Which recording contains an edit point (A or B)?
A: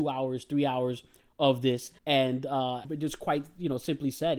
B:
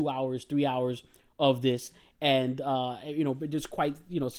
A